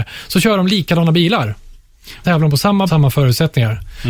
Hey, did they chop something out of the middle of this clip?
yes; 2 cuts; at 2.2 s, 2.9 s

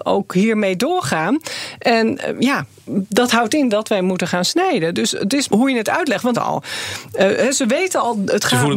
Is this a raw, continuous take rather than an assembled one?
no; 2 cuts; at 5.5 s, 6.3 s

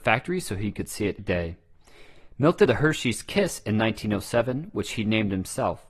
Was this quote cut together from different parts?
yes; 2 cuts; at 1.2 s, 2.7 s

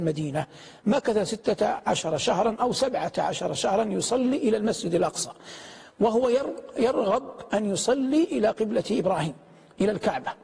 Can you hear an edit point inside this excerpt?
no; 0 cuts

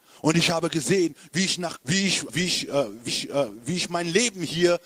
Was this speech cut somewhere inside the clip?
yes; 3 cuts; at 1.8 s, 2.3 s, 3.1 s

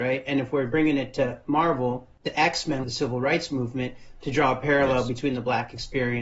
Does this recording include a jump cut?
yes; 2 cuts; at 2.1 s, 2.8 s

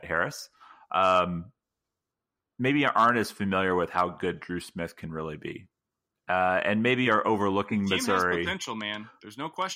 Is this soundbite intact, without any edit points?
yes; 0 cuts

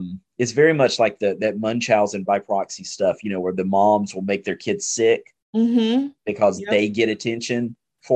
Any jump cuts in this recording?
no; 0 cuts

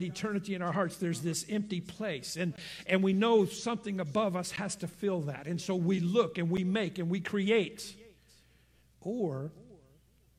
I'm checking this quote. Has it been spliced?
no; 0 cuts

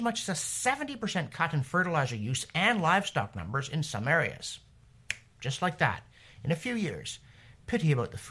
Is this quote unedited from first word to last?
yes; 0 cuts

